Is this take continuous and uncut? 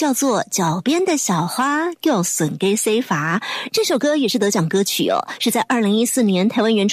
yes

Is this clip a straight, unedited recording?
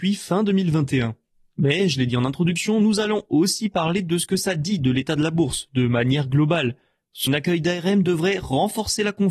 no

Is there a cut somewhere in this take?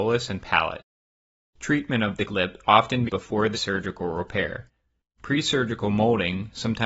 yes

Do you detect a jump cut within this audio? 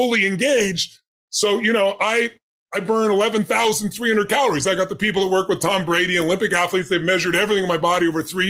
no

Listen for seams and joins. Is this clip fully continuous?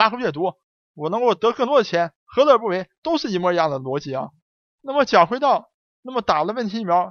yes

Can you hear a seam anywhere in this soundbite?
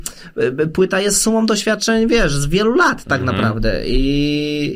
no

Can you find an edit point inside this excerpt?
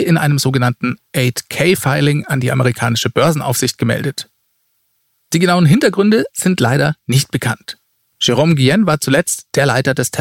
no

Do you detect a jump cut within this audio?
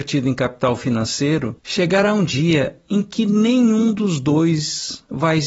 yes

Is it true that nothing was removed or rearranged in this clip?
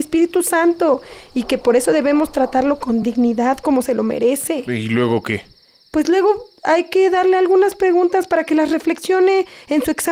yes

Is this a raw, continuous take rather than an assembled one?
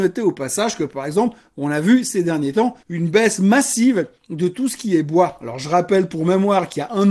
no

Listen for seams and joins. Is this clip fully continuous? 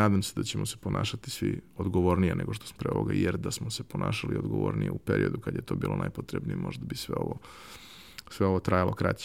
no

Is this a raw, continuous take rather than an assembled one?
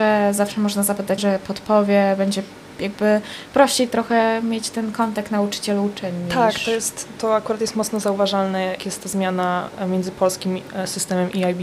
no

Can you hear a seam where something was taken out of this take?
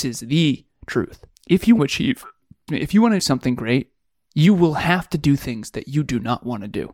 yes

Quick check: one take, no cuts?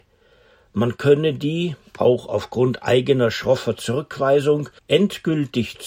no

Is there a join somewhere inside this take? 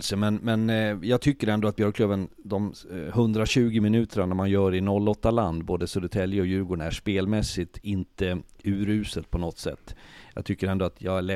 no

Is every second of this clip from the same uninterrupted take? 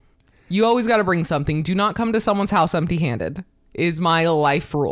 yes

